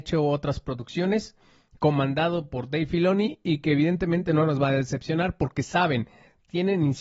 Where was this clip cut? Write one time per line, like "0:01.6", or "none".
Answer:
none